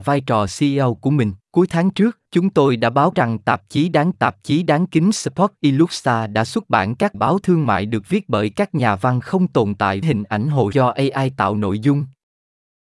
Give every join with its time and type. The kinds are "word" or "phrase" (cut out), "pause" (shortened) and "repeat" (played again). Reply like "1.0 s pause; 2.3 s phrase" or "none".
1.4 s pause; 2.3 s pause; 3.1 s word; 4.1 s repeat; 7.1 s word; 10.0 s word; 10.7 s word